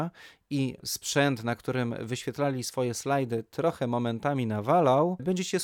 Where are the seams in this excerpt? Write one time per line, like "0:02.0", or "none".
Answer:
none